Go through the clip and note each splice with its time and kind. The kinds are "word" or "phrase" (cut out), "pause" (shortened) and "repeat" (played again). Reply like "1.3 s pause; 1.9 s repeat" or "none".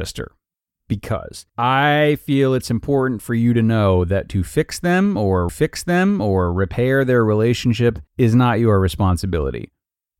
1.5 s pause; 4.3 s word; 5.5 s repeat; 8.1 s pause